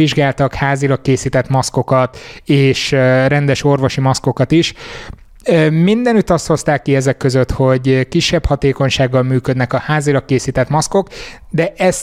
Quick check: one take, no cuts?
yes; 0 cuts

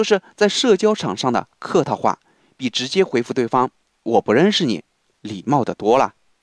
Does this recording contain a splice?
no; 0 cuts

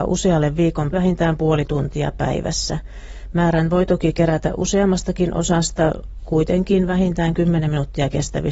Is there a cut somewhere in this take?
yes; 1 cut; at 0.9 s

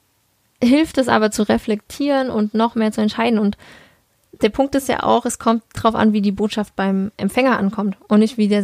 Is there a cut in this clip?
yes; 1 cut; at 5.8 s

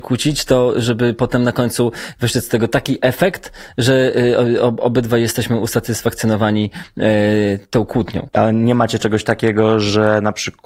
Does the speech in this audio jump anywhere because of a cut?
no; 0 cuts

